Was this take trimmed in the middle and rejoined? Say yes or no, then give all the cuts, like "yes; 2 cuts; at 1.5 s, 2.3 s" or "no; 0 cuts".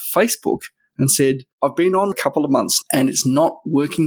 yes; 3 cuts; at 1.5 s, 2.1 s, 2.8 s